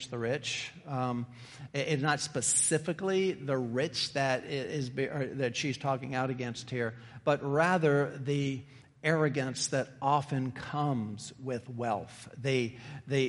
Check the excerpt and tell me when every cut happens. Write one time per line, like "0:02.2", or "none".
none